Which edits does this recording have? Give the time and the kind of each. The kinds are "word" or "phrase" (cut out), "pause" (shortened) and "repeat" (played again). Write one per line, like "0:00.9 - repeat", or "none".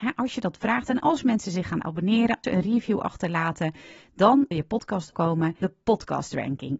0:02.4 - word
0:04.5 - word
0:05.1 - word
0:05.6 - word